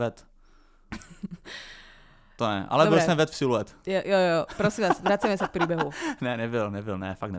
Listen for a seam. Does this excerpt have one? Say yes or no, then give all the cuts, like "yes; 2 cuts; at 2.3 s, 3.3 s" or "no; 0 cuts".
no; 0 cuts